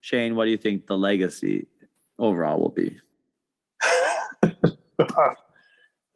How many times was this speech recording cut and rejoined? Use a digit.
0